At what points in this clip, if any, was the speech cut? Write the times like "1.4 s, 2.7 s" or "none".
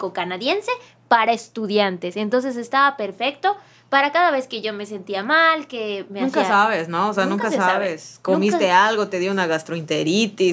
none